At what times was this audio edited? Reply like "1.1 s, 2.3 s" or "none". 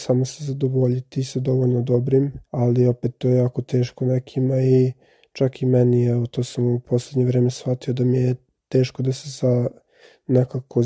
2.5 s